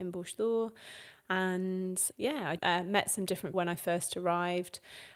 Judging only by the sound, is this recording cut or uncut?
cut